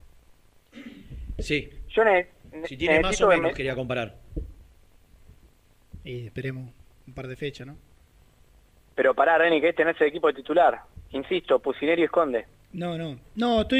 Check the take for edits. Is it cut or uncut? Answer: uncut